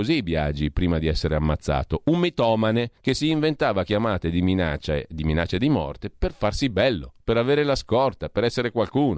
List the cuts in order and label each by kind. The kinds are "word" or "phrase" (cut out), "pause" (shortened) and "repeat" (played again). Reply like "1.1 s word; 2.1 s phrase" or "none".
3.0 s pause